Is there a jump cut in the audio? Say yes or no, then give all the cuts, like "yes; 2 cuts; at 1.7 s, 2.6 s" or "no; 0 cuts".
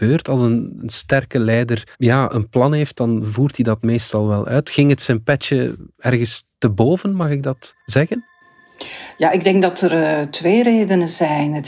yes; 2 cuts; at 1.9 s, 7.8 s